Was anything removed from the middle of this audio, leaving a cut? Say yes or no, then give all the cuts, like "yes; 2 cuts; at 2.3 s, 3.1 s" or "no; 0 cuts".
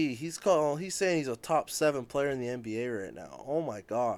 no; 0 cuts